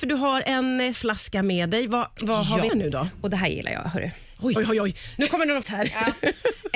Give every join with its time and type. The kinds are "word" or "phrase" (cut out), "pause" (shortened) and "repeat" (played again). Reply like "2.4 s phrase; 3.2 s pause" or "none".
0.9 s word; 2.7 s word; 4.6 s word; 5.6 s word